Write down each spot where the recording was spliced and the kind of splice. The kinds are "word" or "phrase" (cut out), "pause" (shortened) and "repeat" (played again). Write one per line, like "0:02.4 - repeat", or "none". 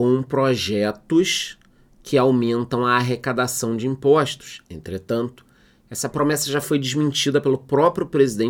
none